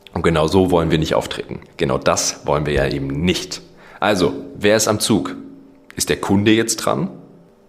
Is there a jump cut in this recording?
no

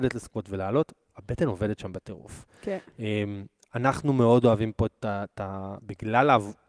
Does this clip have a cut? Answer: no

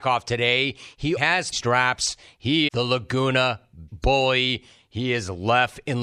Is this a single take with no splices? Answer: no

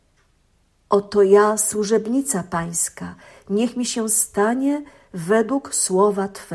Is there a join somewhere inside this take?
no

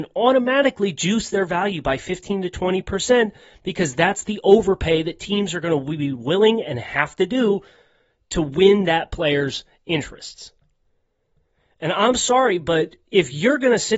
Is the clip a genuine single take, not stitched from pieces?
yes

